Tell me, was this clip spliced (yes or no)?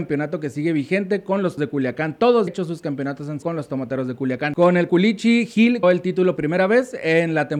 yes